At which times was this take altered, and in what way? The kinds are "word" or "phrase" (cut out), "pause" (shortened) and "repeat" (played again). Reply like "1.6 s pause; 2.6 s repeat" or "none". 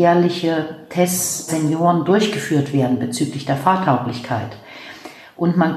1.5 s word